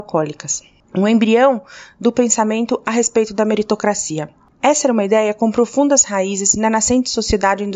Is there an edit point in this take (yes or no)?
no